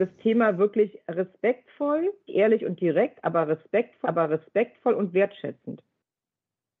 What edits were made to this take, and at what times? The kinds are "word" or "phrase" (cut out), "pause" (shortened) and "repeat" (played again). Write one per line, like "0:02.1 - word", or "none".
0:02.3 - word
0:04.0 - repeat